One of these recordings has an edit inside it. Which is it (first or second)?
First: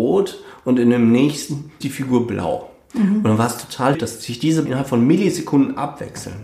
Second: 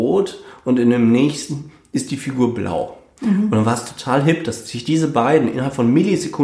first